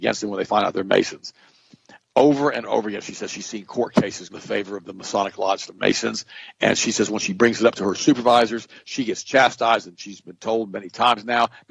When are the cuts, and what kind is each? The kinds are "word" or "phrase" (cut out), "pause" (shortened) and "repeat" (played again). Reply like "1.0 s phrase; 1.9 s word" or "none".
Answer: 2.6 s word; 4.3 s word; 5.7 s word